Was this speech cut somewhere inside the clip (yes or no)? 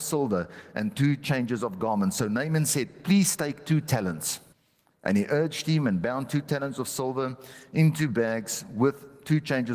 yes